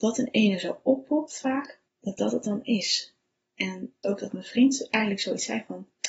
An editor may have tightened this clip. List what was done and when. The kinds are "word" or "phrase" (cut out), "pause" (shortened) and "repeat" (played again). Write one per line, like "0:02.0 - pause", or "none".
0:01.9 - pause
0:04.0 - phrase